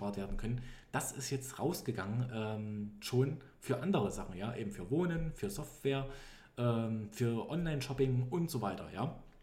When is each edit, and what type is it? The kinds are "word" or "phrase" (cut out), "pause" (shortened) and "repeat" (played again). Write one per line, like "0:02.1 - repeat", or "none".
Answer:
none